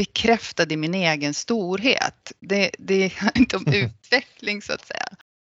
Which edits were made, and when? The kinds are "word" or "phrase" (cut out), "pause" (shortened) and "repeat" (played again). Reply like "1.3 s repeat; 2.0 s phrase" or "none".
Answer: 3.4 s phrase